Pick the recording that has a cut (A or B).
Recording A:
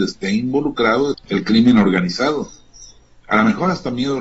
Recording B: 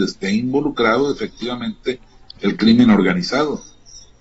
A